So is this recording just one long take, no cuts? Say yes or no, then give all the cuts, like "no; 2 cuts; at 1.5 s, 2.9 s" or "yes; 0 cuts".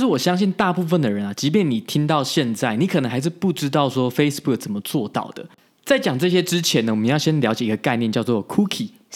yes; 0 cuts